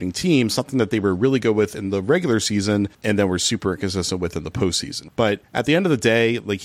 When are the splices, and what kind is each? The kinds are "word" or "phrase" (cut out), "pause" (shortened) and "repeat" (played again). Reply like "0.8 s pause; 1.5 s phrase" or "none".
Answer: none